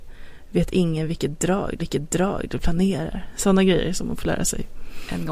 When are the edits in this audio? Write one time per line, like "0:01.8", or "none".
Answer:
0:01.8